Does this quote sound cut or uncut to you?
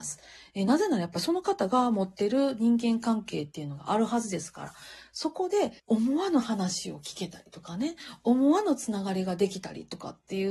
cut